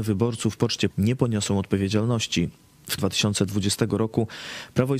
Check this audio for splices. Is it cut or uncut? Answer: cut